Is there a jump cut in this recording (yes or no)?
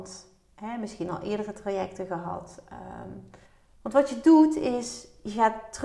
yes